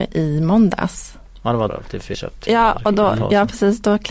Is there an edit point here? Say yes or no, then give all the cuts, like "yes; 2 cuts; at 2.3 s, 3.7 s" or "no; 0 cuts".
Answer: yes; 2 cuts; at 1.7 s, 2.1 s